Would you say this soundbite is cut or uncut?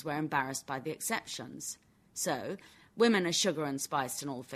uncut